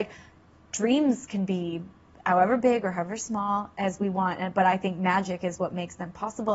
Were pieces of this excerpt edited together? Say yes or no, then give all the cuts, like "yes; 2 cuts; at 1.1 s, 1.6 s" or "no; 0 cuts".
no; 0 cuts